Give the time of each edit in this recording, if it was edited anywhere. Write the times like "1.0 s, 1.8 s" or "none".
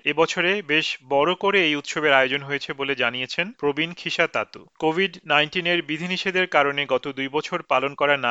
none